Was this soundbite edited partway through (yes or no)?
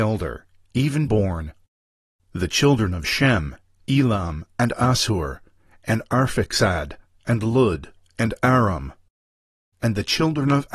yes